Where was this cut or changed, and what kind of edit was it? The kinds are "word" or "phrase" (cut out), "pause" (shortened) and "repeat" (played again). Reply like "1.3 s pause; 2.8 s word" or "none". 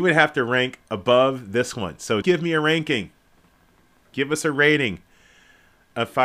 2.2 s word